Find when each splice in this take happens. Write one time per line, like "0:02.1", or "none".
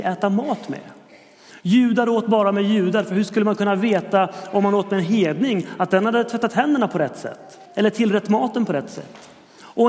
0:07.7